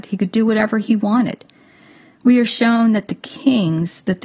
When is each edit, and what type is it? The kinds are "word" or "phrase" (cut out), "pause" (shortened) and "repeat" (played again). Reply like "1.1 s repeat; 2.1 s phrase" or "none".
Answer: none